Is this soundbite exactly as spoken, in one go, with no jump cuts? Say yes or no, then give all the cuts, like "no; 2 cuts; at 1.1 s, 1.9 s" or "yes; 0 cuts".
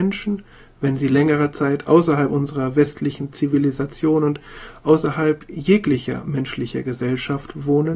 yes; 0 cuts